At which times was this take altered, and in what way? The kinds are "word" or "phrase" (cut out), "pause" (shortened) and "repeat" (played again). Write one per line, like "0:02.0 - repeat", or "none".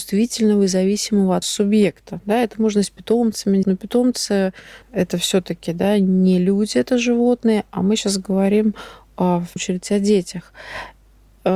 0:01.4 - word
0:03.6 - word
0:04.8 - word
0:09.6 - word